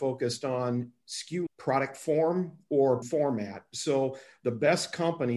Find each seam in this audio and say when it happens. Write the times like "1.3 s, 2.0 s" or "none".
1.5 s, 3.0 s